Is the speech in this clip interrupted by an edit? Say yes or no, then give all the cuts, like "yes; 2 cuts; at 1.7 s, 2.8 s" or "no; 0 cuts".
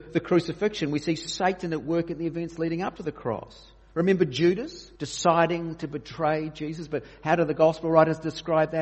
yes; 1 cut; at 5.0 s